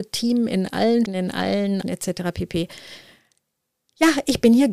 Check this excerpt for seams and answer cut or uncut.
cut